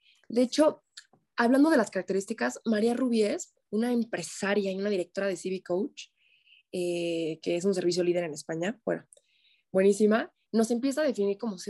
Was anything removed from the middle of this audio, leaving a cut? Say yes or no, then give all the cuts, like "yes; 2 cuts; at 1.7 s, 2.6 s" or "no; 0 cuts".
yes; 2 cuts; at 3.6 s, 10.4 s